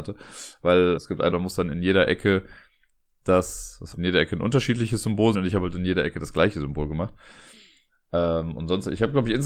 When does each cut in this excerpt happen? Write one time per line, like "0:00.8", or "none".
0:01.0
0:01.3
0:03.9
0:05.3